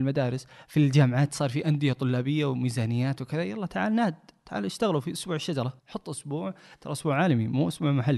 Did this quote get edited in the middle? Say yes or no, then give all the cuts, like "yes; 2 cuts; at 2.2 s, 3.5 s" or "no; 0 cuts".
yes; 1 cut; at 5.8 s